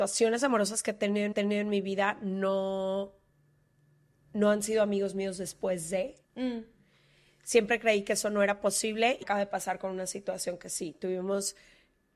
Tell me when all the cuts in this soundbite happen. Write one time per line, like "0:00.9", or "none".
0:01.3
0:06.2
0:09.2